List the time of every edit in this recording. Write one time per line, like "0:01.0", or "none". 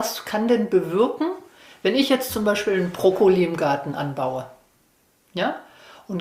none